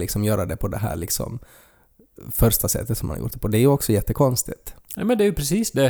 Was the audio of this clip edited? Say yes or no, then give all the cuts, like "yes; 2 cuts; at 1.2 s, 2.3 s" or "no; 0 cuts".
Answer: no; 0 cuts